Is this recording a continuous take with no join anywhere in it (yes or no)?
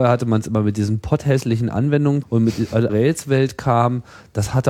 no